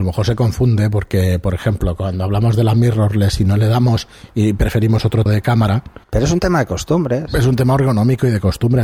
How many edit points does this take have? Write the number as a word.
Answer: two